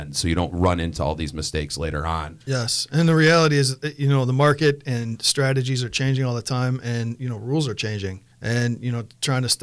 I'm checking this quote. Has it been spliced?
yes; 1 cut; at 8.3 s

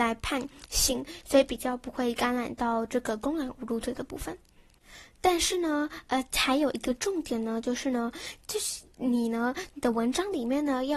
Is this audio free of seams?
yes; 0 cuts

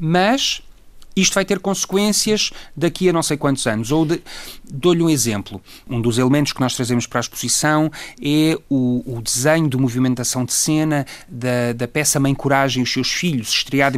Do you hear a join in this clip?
no; 0 cuts

